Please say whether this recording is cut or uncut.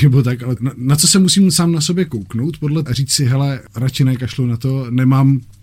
cut